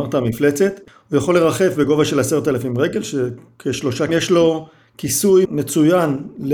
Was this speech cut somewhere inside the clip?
yes; 1 cut; at 4.1 s

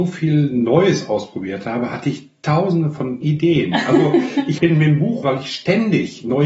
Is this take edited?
yes; 3 cuts; at 3.2 s, 4.6 s, 5.2 s

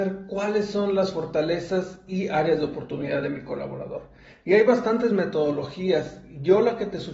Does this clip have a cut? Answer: no; 0 cuts

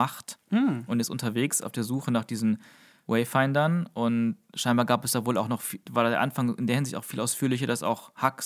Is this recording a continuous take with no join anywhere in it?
yes; 0 cuts

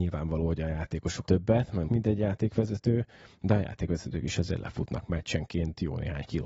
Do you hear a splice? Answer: yes; 2 cuts; at 1.2 s, 1.9 s

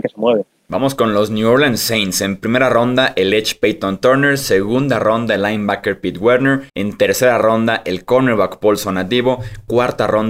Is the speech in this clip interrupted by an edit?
yes; 1 cut; at 6.7 s

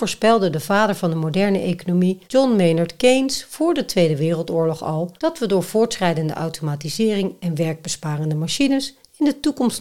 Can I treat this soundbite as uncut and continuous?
no; 2 cuts; at 2.2 s, 5.2 s

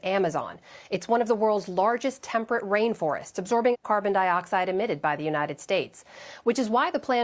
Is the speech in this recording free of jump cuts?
yes; 0 cuts

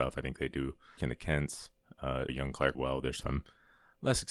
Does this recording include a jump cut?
yes; 4 cuts; at 1.0 s, 2.3 s, 2.7 s, 3.2 s

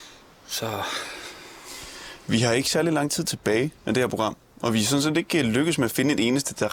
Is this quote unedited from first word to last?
yes; 0 cuts

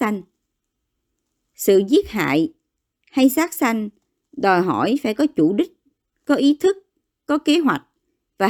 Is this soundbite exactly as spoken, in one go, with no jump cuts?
yes; 0 cuts

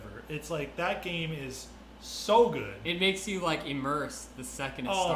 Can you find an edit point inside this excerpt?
no; 0 cuts

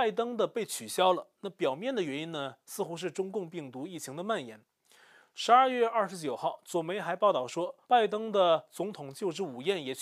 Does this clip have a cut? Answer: yes; 1 cut; at 7.8 s

